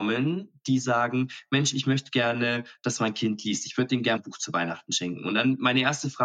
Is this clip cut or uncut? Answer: cut